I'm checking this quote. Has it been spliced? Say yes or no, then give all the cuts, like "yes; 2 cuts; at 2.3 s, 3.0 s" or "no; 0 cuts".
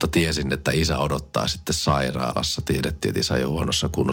no; 0 cuts